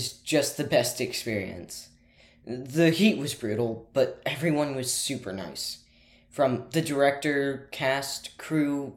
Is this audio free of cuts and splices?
yes; 0 cuts

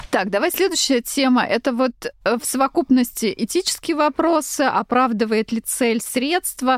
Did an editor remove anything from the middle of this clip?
no; 0 cuts

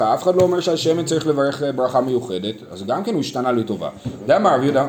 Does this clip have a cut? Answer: no; 0 cuts

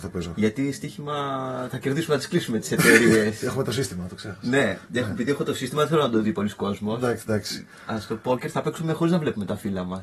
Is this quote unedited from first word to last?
yes; 0 cuts

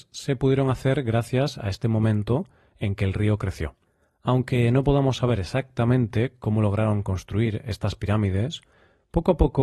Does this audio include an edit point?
no; 0 cuts

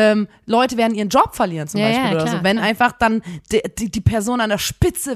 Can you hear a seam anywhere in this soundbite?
no; 0 cuts

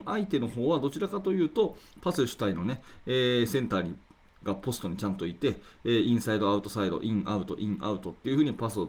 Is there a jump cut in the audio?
no; 0 cuts

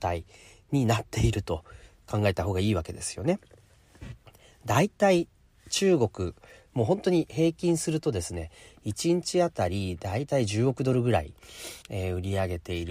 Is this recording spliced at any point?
yes; 1 cut; at 11.8 s

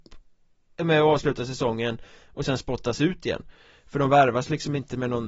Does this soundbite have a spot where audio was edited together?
no; 0 cuts

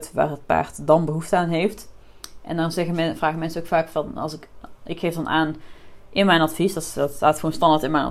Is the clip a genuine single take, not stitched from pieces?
yes; 0 cuts

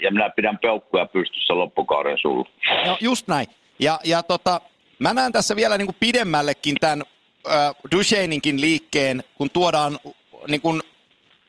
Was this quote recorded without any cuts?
yes; 0 cuts

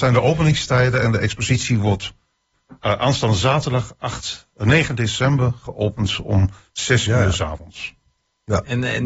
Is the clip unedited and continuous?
yes; 0 cuts

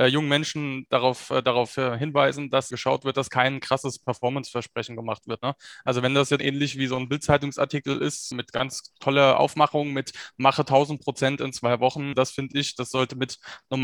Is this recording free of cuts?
no; 4 cuts; at 2.7 s, 6.4 s, 8.3 s, 12.1 s

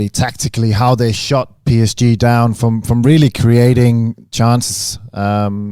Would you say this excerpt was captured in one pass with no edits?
yes; 0 cuts

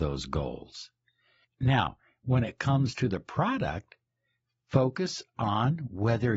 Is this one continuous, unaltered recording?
yes; 0 cuts

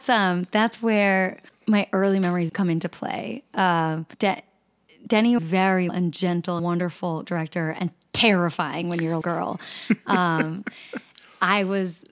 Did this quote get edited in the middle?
yes; 8 cuts; at 1.5 s, 2.5 s, 4.1 s, 5.4 s, 5.9 s, 6.6 s, 7.2 s, 9.2 s

